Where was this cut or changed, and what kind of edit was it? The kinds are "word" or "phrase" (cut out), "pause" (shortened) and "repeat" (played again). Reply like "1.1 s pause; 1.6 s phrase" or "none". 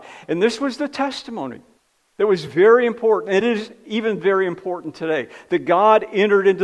none